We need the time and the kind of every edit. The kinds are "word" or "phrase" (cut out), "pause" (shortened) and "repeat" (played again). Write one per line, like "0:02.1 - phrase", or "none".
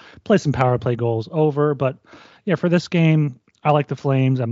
none